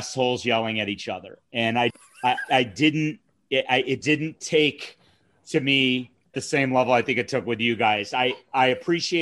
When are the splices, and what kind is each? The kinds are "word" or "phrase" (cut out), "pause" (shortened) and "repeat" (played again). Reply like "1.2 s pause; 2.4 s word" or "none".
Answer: 1.9 s word; 2.5 s word; 4.0 s word; 6.3 s word

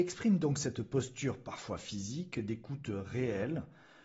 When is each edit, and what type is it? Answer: none

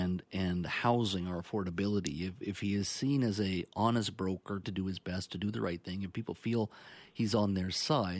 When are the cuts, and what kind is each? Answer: 4.6 s word

